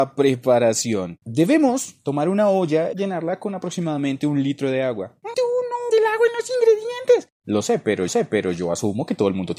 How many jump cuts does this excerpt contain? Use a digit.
5